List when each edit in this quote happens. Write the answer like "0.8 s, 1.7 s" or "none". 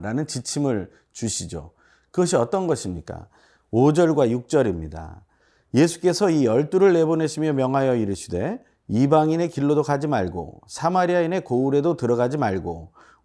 none